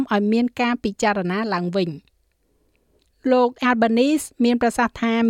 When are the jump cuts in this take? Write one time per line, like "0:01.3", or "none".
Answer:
0:03.6